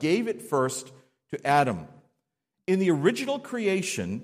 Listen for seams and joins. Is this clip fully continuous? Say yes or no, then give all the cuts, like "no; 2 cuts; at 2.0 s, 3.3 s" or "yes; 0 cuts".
yes; 0 cuts